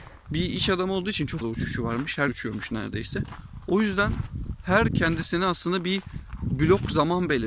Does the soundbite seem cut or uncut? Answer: cut